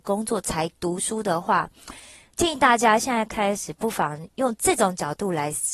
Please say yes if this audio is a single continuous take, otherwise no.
yes